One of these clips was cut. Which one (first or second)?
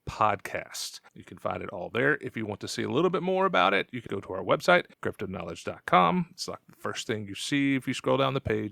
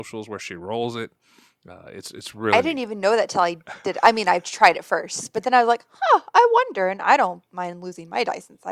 first